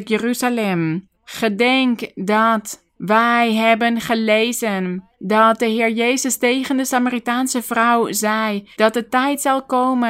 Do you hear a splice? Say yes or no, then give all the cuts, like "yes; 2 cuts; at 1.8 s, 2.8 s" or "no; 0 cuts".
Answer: yes; 4 cuts; at 1.1 s, 2.9 s, 5.1 s, 8.7 s